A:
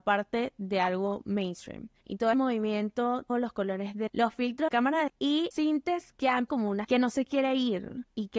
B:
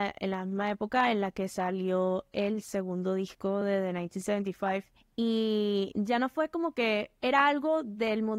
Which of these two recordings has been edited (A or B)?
A